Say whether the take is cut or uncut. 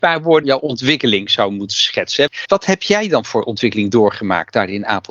uncut